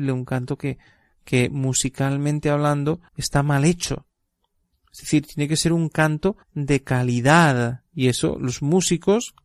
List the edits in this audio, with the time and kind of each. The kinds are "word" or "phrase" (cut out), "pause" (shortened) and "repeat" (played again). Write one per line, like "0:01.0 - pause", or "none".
0:03.1 - pause
0:06.4 - pause
0:07.9 - pause